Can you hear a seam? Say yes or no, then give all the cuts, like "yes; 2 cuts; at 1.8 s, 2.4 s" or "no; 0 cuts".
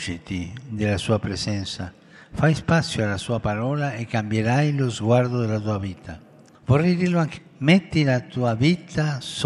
yes; 1 cut; at 7.3 s